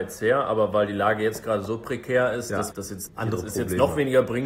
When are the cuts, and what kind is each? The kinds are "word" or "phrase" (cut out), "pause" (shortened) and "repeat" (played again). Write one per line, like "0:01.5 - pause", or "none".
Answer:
0:02.7 - word
0:03.1 - word